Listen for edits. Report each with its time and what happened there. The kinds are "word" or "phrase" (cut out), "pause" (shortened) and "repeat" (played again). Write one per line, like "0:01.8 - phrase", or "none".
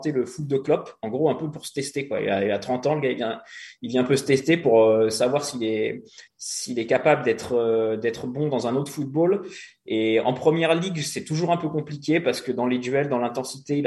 0:06.3 - pause